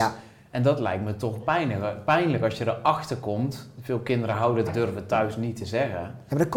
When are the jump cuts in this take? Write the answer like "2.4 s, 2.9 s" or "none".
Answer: 1.4 s, 4.7 s